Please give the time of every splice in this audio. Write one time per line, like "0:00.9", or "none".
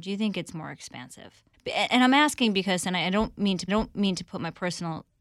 0:01.5
0:03.7